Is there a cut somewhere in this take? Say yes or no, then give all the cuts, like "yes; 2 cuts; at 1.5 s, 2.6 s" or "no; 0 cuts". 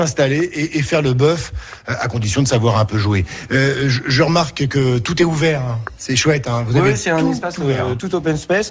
no; 0 cuts